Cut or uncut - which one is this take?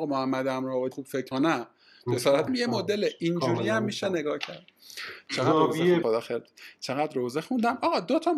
cut